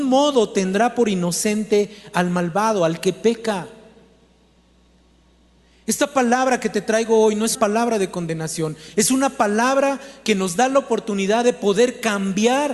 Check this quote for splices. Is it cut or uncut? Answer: cut